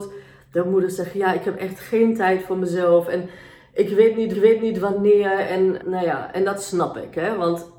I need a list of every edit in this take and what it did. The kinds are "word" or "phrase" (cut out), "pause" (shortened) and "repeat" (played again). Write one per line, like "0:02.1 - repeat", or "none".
0:04.3 - repeat
0:05.8 - word